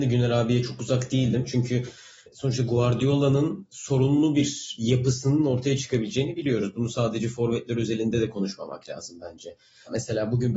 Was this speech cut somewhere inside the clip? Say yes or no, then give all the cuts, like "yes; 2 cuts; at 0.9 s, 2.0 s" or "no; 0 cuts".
no; 0 cuts